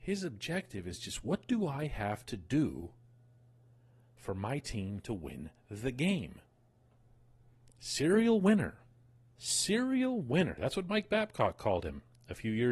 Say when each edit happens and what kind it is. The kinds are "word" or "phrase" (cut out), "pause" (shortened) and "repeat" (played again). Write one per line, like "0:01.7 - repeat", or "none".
none